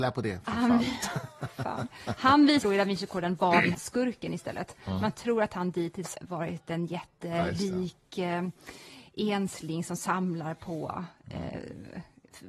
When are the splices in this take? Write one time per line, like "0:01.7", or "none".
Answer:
0:02.6
0:03.7
0:06.1

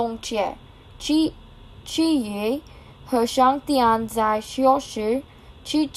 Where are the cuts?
none

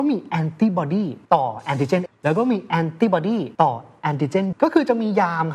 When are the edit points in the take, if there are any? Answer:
0:01.3
0:02.1
0:03.5
0:04.5

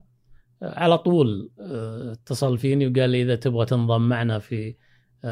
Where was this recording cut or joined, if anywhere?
none

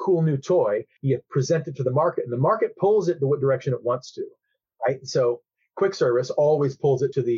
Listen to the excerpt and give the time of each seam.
none

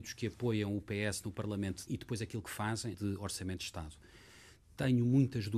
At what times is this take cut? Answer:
0:01.9
0:02.9

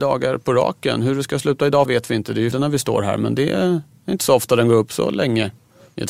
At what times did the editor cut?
0:01.9
0:02.5

